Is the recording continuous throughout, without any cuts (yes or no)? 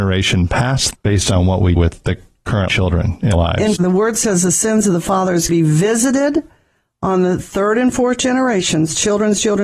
no